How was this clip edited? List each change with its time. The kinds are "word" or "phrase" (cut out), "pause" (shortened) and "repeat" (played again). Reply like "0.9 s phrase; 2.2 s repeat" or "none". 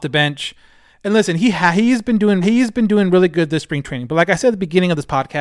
2.4 s repeat